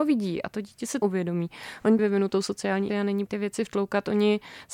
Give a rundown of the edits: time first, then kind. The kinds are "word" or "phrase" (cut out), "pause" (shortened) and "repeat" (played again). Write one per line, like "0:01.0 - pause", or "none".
0:01.0 - word
0:02.0 - phrase
0:02.9 - word
0:03.3 - phrase